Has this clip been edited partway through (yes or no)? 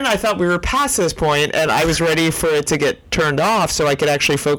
no